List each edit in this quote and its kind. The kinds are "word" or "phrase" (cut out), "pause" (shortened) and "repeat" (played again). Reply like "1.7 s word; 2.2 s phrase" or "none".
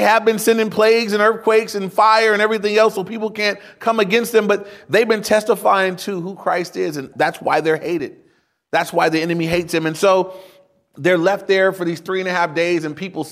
none